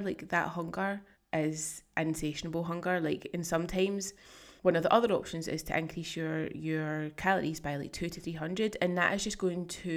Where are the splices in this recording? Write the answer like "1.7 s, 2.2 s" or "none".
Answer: 1.1 s, 4.6 s